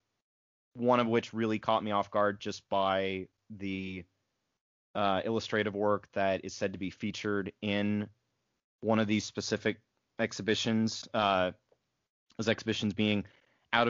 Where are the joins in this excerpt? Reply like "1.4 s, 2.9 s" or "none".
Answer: none